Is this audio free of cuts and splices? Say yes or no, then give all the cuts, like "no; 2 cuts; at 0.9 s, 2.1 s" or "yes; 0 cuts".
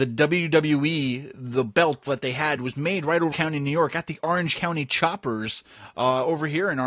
no; 3 cuts; at 2.1 s, 2.6 s, 3.3 s